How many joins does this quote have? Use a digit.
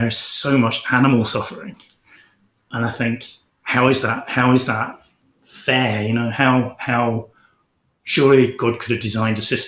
1